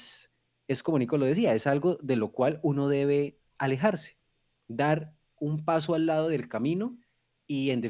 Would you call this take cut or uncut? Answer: uncut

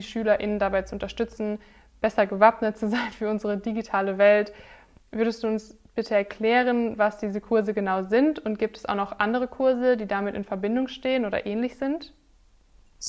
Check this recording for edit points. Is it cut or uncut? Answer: uncut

